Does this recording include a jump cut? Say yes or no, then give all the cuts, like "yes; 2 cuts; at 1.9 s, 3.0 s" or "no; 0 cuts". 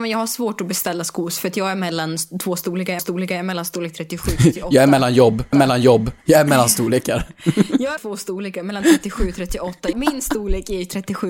yes; 4 cuts; at 3.0 s, 5.5 s, 8.0 s, 9.9 s